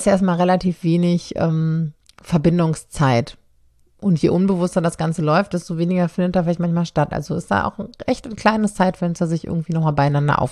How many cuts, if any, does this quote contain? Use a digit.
0